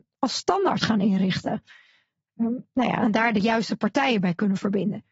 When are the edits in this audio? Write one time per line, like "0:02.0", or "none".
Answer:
none